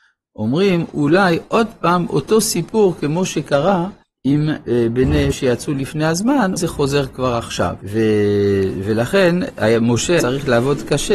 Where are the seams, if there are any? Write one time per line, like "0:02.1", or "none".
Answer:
0:04.0
0:05.3
0:06.6
0:07.8
0:10.2